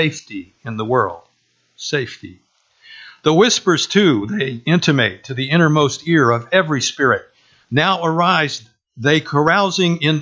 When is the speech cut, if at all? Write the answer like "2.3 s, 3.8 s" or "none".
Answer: none